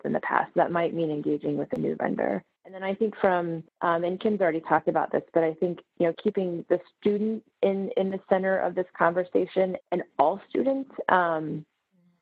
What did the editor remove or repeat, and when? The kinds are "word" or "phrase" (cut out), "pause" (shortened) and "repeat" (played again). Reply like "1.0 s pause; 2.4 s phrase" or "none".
2.6 s pause; 3.7 s pause; 6.1 s word; 6.6 s word; 9.8 s word

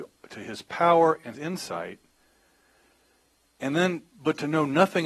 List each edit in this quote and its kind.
1.3 s word; 4.1 s pause

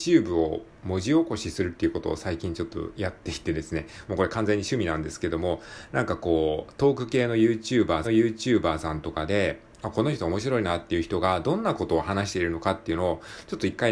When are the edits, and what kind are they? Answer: 8.0 s repeat

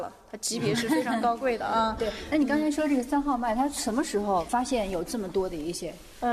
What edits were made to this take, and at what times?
none

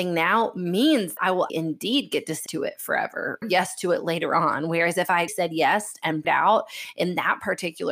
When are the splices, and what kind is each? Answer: 1.2 s word; 1.5 s word; 2.5 s word; 3.4 s word; 5.3 s word; 6.2 s word

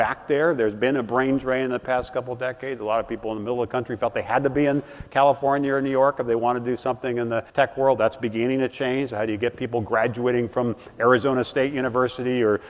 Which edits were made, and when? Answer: 7.5 s pause

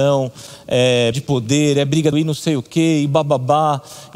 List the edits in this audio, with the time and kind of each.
1.1 s word; 2.1 s word

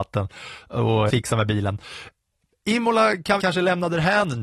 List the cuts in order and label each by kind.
1.1 s word; 3.4 s word

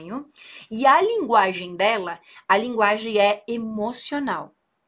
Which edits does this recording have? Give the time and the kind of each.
none

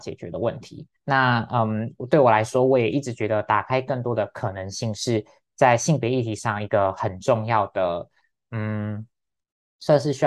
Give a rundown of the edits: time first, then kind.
1.0 s pause

